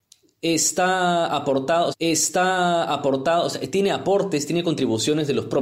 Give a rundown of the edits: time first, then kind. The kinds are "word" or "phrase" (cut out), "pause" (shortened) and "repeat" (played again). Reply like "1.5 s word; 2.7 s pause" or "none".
1.9 s repeat